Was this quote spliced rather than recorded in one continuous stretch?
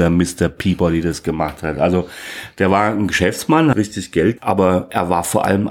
yes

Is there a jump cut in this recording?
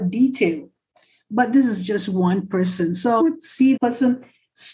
yes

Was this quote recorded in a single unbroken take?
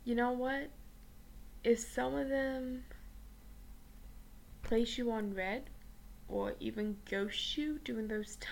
yes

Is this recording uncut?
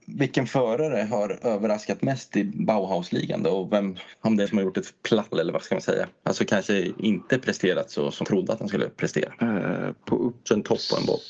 no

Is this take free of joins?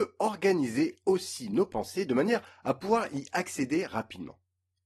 yes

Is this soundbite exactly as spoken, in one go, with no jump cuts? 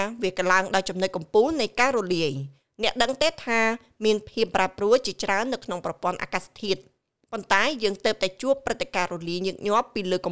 yes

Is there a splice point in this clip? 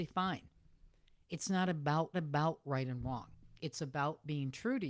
yes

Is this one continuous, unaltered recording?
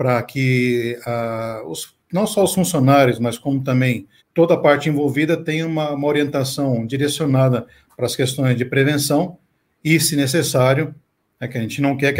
no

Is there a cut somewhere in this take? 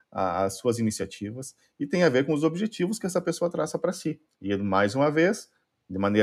yes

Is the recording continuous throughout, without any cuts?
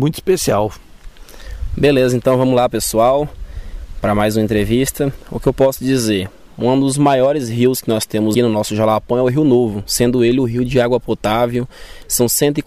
no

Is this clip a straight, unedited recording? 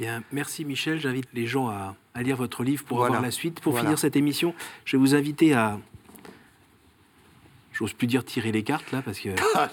no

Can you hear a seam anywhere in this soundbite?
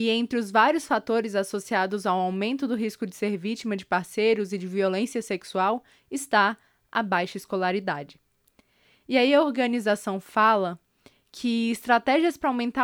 no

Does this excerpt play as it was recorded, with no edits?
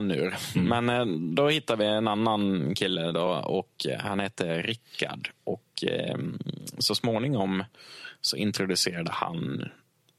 yes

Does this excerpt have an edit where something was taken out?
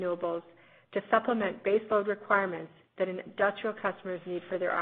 no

